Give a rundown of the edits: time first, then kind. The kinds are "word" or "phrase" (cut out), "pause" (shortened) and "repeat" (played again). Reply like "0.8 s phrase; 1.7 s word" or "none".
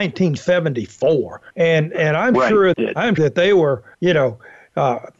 1.5 s pause; 2.7 s word; 3.2 s word; 3.9 s pause